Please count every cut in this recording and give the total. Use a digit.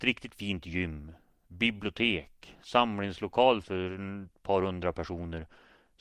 0